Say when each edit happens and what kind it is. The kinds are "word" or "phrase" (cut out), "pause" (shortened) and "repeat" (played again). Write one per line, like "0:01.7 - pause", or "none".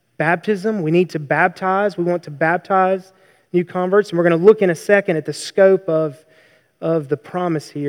none